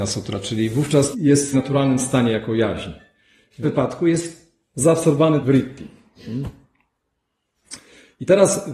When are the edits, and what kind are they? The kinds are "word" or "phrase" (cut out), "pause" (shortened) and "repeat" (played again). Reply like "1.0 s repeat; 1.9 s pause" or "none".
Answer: 1.1 s word; 1.5 s word; 3.6 s word; 5.4 s word